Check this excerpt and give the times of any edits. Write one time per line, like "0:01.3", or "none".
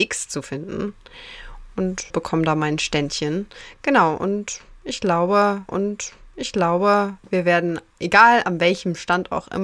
0:05.7